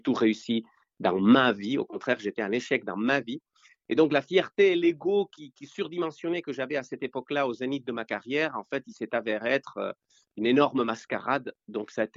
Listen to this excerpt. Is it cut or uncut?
uncut